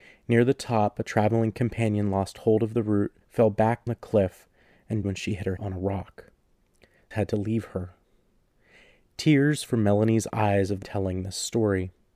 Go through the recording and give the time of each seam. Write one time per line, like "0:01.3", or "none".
0:03.2
0:03.9
0:05.0
0:05.6
0:07.1
0:09.7
0:10.3
0:10.8